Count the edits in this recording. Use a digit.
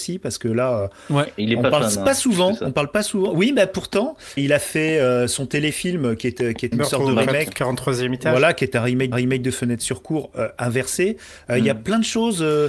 3